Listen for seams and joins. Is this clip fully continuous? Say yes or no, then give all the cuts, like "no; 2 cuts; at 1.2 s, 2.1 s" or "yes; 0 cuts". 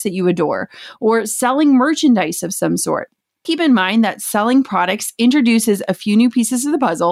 no; 1 cut; at 3.4 s